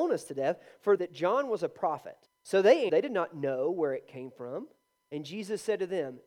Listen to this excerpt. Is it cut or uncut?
cut